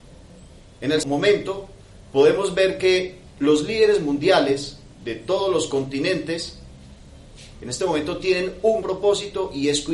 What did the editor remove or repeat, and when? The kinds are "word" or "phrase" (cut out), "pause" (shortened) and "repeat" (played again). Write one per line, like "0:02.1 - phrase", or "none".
0:01.0 - word
0:04.9 - pause
0:08.8 - word